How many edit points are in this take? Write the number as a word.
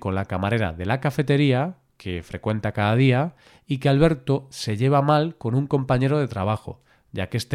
zero